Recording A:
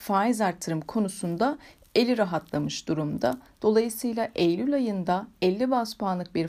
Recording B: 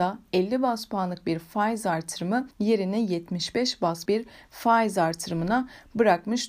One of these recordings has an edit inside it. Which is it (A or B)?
B